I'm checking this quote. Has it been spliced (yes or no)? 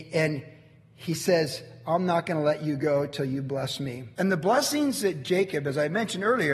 yes